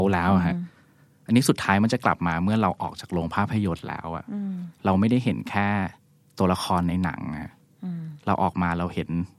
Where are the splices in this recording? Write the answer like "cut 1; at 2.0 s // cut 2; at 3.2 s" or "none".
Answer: cut 1; at 6.1 s